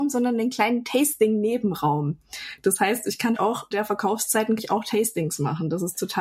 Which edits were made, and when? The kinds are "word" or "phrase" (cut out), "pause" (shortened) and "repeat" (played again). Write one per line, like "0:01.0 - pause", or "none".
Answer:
0:03.3 - word
0:03.7 - word
0:04.6 - word